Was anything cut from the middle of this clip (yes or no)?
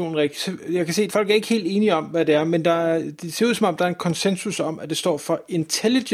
yes